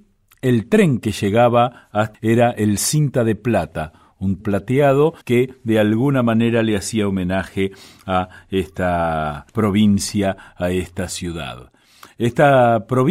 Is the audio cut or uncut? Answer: cut